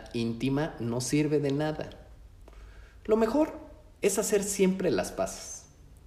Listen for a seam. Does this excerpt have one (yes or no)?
no